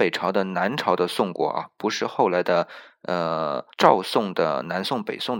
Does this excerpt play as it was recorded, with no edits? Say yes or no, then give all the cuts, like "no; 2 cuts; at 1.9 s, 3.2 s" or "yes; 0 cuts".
no; 1 cut; at 3.7 s